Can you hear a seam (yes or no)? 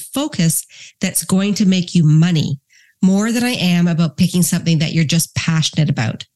no